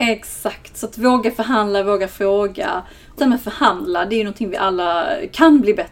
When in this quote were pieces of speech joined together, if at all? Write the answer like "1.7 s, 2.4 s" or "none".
3.2 s

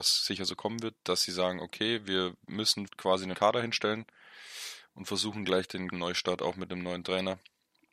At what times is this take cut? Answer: 2.9 s, 3.3 s, 5.4 s, 5.9 s

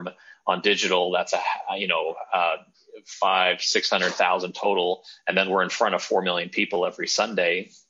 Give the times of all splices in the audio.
none

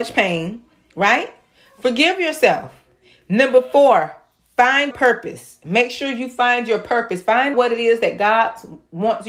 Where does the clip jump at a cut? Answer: 4.9 s, 7.5 s

